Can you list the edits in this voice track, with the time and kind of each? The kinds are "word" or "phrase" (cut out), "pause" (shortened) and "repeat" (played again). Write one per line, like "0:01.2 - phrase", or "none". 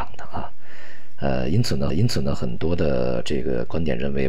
0:01.9 - repeat

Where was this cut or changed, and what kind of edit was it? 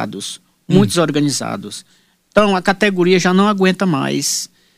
none

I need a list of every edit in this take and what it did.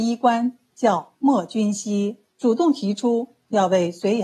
0:02.3 - pause

